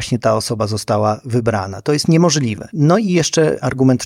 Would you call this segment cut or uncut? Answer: uncut